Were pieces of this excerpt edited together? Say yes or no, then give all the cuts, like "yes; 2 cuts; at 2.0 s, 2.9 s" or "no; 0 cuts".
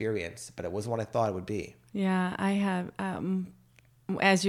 no; 0 cuts